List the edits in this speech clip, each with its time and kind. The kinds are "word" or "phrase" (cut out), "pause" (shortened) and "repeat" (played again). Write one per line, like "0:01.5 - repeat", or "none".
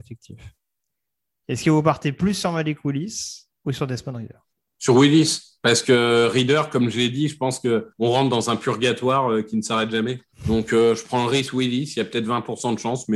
0:04.5 - pause
0:07.9 - pause
0:10.3 - pause